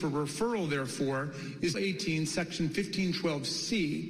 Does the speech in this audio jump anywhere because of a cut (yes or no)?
yes